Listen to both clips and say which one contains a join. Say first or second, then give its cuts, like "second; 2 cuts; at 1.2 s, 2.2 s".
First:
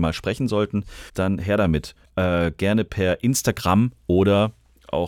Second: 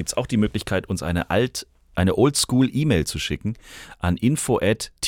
first; 2 cuts; at 1.1 s, 2.0 s